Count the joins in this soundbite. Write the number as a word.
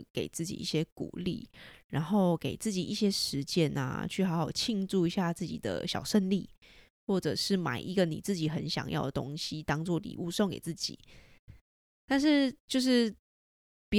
zero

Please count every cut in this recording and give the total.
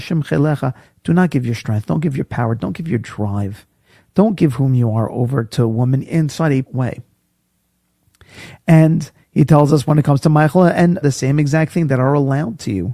three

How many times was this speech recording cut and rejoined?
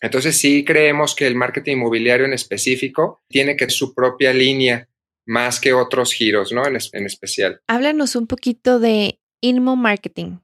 three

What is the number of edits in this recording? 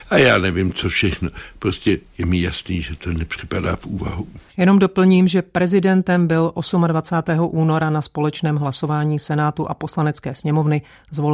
one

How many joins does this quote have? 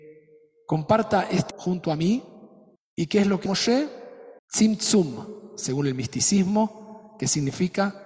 four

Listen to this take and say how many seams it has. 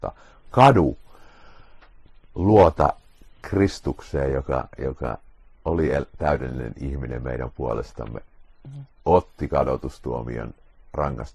zero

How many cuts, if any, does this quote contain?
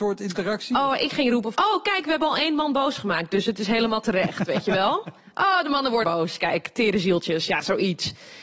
two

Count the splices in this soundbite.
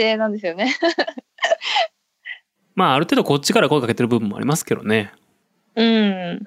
zero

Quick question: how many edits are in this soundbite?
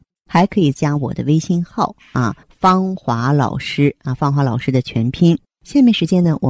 one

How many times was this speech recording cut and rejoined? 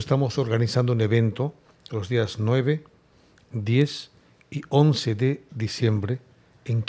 zero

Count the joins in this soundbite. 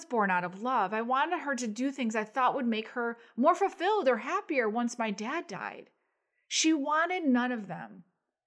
zero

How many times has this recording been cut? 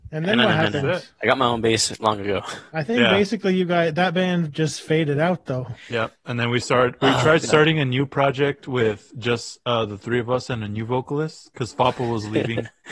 zero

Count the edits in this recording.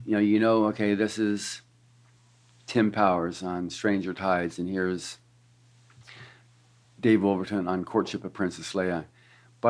zero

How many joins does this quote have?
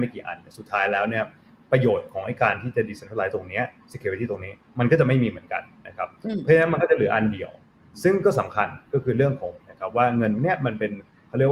one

